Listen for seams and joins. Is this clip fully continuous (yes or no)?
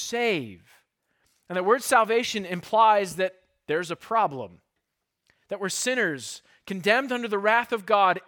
yes